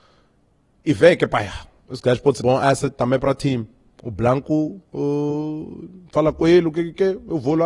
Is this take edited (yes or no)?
yes